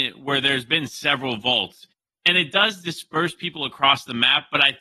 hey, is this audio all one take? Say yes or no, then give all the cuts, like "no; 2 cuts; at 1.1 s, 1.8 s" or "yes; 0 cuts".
yes; 0 cuts